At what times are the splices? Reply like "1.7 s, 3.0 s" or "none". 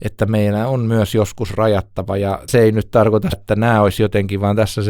2.5 s, 3.3 s